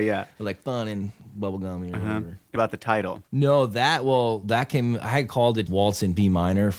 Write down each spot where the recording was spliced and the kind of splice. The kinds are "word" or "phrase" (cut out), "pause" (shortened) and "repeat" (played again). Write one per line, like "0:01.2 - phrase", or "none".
0:02.6 - word
0:05.7 - word

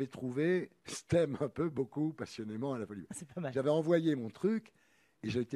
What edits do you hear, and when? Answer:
none

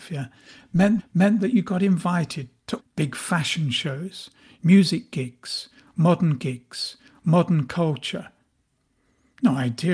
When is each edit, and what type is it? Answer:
0:01.0 - repeat
0:02.8 - phrase
0:06.4 - repeat

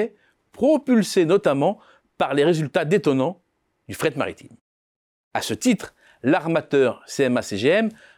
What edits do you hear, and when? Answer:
none

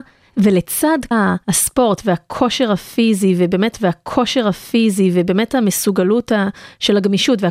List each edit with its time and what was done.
0:01.1 - word
0:01.4 - pause
0:03.7 - repeat

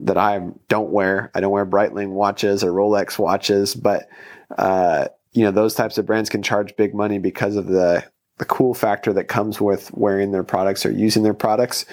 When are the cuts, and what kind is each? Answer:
none

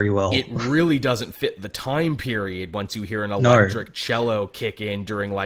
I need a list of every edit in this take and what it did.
none

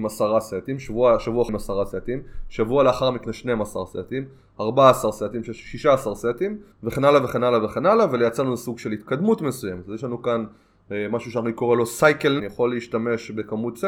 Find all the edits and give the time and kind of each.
0:01.5 - word
0:03.2 - word
0:06.7 - pause
0:12.4 - phrase

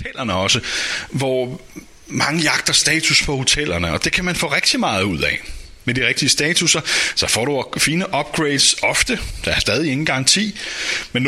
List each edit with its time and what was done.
none

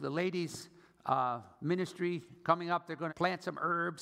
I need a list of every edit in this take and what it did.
0:01.5 - pause
0:03.1 - word

